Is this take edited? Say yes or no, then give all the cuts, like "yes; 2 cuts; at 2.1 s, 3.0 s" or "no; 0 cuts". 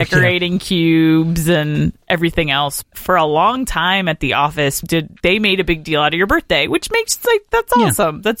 yes; 3 cuts; at 2.8 s, 4.8 s, 5.2 s